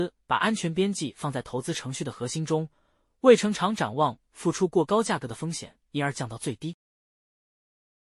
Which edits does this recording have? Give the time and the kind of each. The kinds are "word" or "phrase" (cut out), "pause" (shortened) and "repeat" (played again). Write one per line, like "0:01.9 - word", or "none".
none

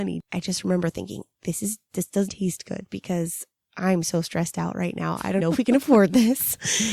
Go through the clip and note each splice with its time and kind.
0:02.3 - word
0:05.4 - word

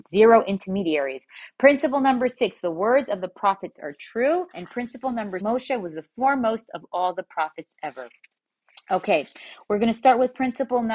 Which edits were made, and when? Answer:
0:04.5 - pause
0:05.4 - word

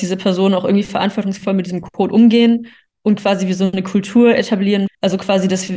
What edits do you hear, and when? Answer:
none

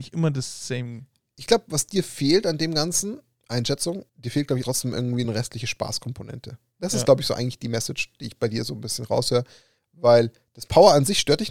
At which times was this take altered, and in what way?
0:04.1 - pause
0:04.6 - word
0:05.2 - phrase

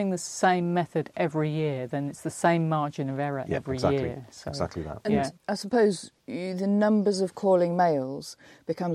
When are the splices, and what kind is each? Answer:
0:05.4 - pause
0:06.2 - pause

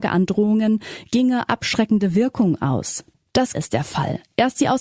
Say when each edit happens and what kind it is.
0:01.5 - word
0:03.5 - word

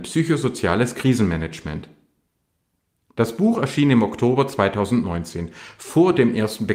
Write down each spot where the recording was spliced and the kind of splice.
none

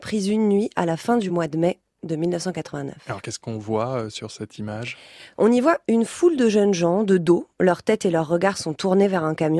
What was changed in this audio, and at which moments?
none

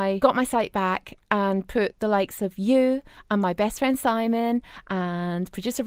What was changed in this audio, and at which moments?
none

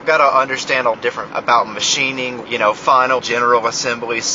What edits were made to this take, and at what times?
0:00.9 - word
0:01.3 - word
0:02.4 - word
0:03.2 - word

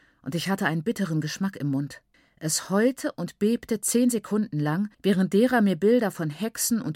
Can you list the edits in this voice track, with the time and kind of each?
0:02.1 - pause
0:04.9 - pause

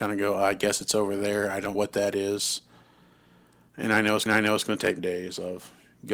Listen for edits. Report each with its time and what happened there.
0:01.7 - word
0:04.3 - repeat
0:05.0 - phrase

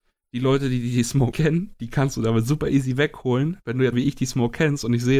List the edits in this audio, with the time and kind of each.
0:01.3 - word
0:03.9 - word

